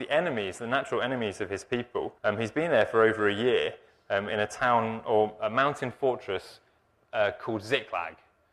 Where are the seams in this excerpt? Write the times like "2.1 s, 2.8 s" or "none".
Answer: 2.2 s